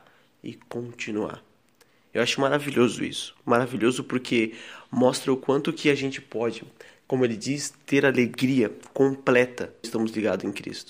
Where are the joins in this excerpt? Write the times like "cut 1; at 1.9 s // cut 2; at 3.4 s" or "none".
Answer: cut 1; at 9.8 s